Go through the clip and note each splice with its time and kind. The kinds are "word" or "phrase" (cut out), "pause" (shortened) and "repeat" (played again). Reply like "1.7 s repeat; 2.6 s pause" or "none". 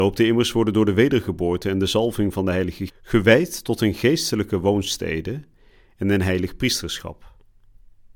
2.9 s word